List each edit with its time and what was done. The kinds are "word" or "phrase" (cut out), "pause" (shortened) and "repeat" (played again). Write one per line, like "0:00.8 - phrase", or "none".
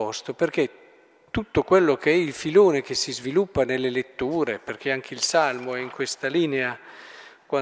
none